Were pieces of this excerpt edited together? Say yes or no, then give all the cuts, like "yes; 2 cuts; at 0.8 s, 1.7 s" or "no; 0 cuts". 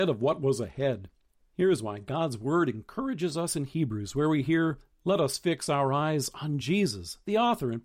no; 0 cuts